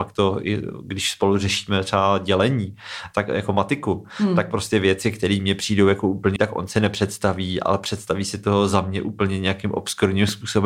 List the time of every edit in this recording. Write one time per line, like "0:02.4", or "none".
0:06.4